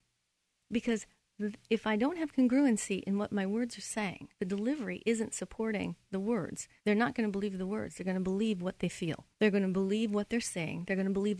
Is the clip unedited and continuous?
no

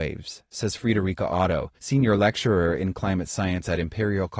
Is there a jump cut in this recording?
yes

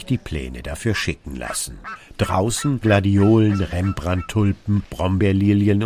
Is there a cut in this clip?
yes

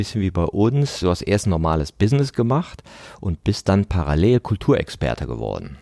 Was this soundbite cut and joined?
no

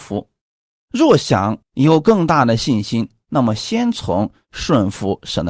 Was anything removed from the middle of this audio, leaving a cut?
yes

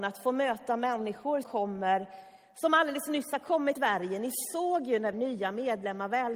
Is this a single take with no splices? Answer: no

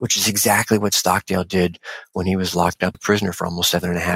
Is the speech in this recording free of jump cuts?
no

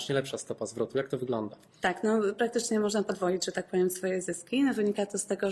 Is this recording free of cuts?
yes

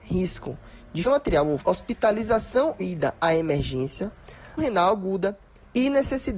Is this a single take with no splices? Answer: no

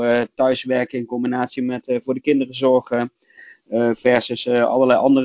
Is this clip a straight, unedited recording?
yes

